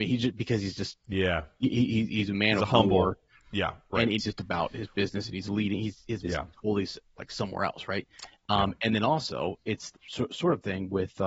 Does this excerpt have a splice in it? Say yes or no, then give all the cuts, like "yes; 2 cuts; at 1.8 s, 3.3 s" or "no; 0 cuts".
yes; 3 cuts; at 4.2 s, 6.2 s, 9.9 s